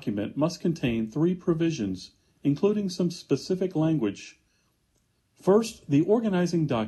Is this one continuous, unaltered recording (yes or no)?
yes